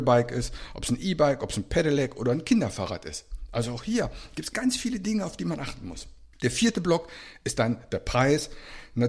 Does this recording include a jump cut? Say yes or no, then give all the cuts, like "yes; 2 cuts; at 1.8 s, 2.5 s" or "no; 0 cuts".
yes; 1 cut; at 6.3 s